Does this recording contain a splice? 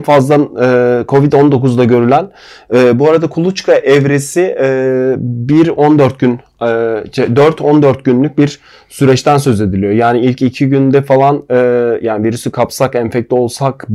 no; 0 cuts

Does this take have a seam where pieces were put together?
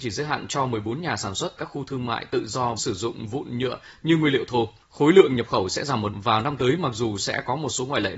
yes; 4 cuts; at 1.6 s, 2.8 s, 4.8 s, 6.1 s

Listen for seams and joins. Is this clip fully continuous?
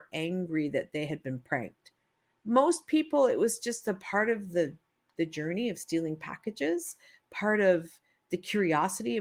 yes; 0 cuts

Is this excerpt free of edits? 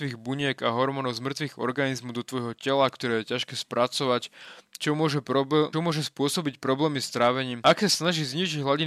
no; 1 cut; at 5.7 s

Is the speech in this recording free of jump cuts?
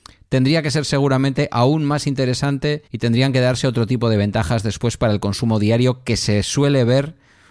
no; 1 cut; at 2.9 s

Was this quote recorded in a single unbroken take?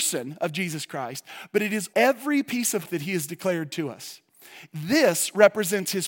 no; 2 cuts; at 1.9 s, 2.8 s

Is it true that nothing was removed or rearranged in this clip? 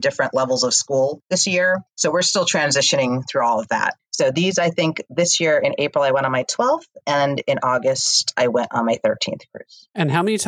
yes; 0 cuts

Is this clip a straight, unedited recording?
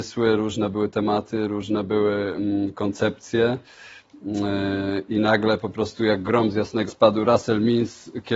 no; 1 cut; at 6.9 s

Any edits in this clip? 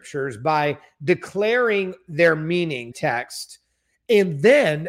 yes; 1 cut; at 2.9 s

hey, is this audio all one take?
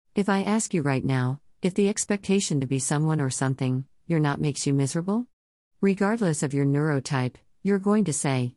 yes; 0 cuts

